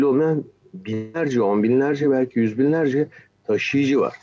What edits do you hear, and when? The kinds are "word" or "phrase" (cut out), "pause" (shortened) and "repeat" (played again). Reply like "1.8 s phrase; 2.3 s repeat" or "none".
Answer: none